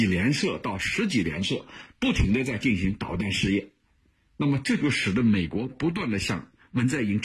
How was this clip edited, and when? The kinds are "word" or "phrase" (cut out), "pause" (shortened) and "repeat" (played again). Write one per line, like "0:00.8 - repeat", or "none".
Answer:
none